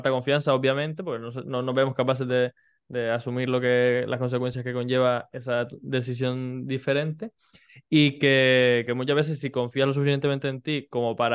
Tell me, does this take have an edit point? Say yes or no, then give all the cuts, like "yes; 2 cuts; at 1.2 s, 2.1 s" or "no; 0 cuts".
no; 0 cuts